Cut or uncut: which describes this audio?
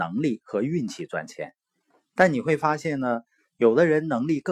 uncut